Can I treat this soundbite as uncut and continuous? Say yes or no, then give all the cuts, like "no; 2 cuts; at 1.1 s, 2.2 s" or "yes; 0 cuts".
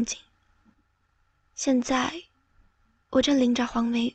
yes; 0 cuts